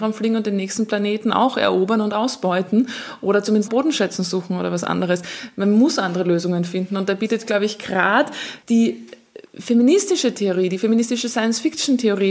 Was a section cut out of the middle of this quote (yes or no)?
yes